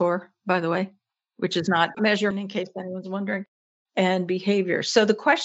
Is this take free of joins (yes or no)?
no